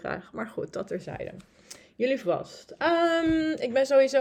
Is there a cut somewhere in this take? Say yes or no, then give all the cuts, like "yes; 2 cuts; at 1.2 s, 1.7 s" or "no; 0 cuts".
yes; 1 cut; at 2.2 s